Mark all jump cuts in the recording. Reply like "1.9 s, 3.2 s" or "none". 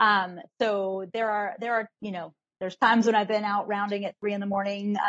none